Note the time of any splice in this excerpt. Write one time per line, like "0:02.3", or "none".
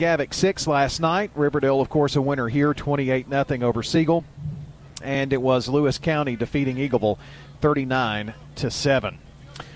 none